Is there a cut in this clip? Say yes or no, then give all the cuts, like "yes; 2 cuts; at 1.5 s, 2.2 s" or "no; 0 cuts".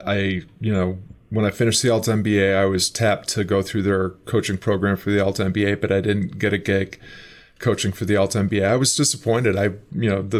no; 0 cuts